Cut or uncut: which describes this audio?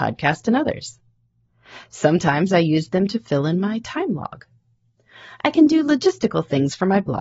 uncut